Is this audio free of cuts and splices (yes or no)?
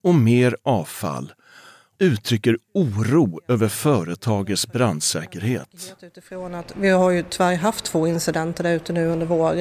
no